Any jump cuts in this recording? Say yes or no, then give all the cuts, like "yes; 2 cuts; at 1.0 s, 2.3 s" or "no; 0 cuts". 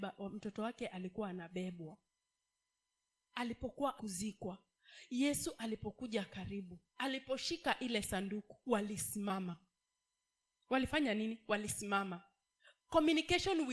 yes; 2 cuts; at 4.0 s, 8.6 s